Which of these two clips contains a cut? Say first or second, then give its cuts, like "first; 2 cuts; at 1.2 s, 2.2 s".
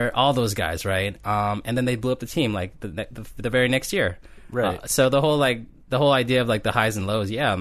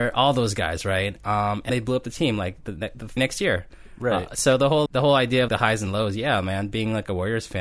second; 4 cuts; at 1.7 s, 3.2 s, 4.9 s, 5.5 s